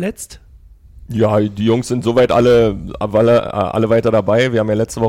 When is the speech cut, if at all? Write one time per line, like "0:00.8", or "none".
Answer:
none